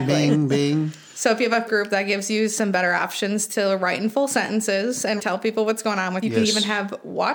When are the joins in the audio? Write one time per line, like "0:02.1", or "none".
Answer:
0:01.7
0:05.2
0:06.2